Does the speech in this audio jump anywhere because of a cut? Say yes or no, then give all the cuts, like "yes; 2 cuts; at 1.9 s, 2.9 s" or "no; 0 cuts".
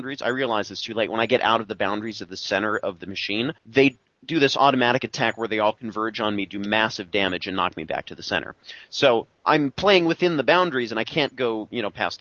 yes; 1 cut; at 3.6 s